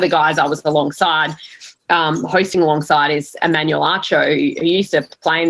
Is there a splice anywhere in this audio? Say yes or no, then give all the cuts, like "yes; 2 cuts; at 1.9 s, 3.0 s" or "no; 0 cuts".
no; 0 cuts